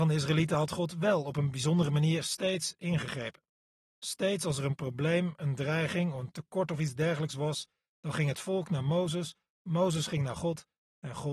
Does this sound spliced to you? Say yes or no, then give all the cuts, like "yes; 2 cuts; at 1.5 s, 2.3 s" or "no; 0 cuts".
no; 0 cuts